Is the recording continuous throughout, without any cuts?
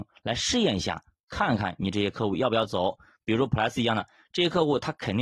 yes; 0 cuts

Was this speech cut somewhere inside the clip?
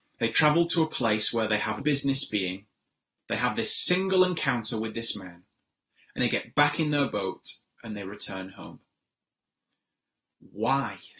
yes; 2 cuts; at 1.8 s, 6.2 s

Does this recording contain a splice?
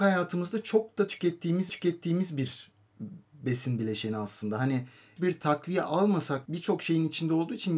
yes; 3 cuts; at 1.7 s, 5.2 s, 6.5 s

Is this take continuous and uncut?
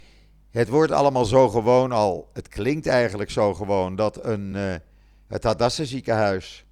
yes; 0 cuts

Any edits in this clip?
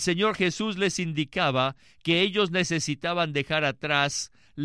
no; 0 cuts

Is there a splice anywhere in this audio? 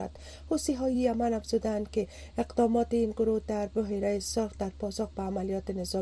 no; 0 cuts

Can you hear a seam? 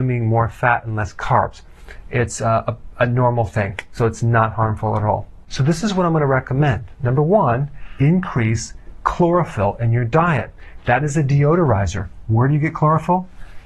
no; 0 cuts

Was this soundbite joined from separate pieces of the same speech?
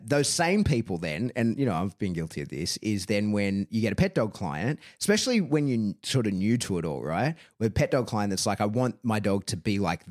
no; 0 cuts

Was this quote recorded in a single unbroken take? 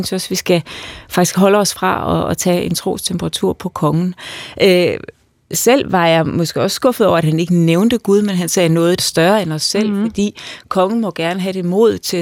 no; 1 cut; at 9.0 s

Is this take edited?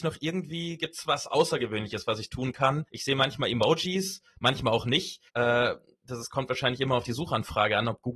yes; 2 cuts; at 2.9 s, 5.3 s

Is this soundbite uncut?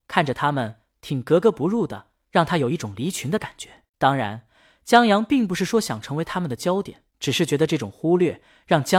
no; 2 cuts; at 3.9 s, 7.1 s

